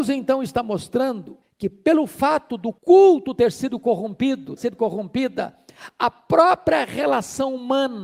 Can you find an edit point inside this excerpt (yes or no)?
yes